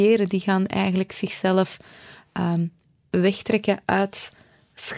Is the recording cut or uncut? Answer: uncut